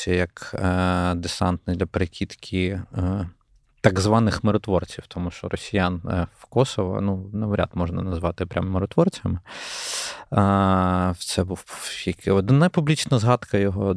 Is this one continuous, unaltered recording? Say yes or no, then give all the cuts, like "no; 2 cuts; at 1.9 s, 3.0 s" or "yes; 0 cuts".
yes; 0 cuts